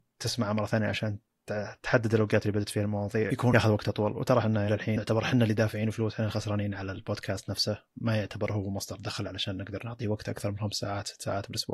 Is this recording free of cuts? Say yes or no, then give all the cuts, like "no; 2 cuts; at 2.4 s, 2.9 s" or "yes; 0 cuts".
no; 2 cuts; at 4.7 s, 7.9 s